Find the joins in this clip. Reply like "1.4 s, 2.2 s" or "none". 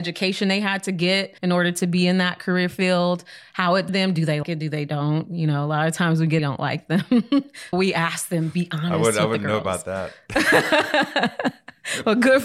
1.4 s, 3.9 s, 4.4 s, 6.4 s, 7.7 s